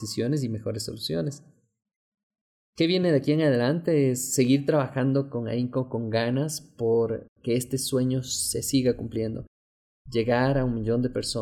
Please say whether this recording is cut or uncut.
uncut